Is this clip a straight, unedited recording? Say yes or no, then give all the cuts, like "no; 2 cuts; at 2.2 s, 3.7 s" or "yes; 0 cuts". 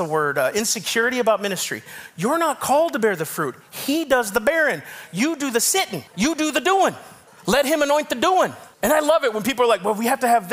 no; 3 cuts; at 6.1 s, 7.3 s, 8.7 s